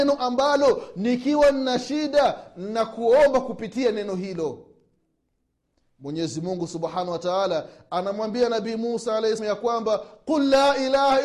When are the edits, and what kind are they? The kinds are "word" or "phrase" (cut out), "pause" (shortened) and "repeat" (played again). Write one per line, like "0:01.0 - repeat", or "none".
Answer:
0:09.4 - word